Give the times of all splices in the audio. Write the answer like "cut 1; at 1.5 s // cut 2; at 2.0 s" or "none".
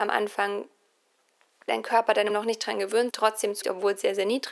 cut 1; at 1.7 s // cut 2; at 2.3 s // cut 3; at 3.1 s // cut 4; at 3.6 s